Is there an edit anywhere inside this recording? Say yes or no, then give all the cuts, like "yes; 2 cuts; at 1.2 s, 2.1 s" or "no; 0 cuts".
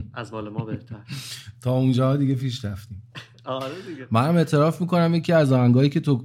no; 0 cuts